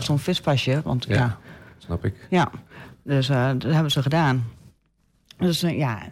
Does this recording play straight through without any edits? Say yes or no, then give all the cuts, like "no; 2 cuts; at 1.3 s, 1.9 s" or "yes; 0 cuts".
yes; 0 cuts